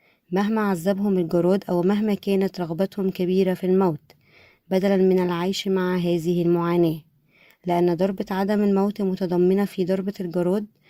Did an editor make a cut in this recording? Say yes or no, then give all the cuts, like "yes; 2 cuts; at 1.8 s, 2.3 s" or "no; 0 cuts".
no; 0 cuts